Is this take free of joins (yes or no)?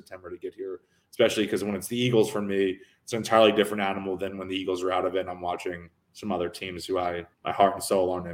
no